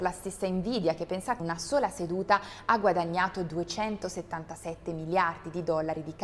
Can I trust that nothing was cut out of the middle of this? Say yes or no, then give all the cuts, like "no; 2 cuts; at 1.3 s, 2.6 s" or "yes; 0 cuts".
no; 1 cut; at 1.4 s